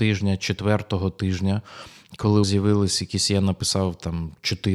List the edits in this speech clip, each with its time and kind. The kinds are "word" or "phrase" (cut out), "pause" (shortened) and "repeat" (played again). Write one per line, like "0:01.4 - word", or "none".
0:02.4 - word